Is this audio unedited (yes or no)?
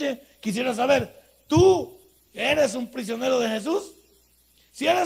yes